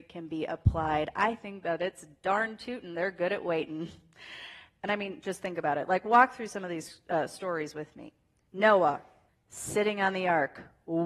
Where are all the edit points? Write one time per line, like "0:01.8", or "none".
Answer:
0:09.3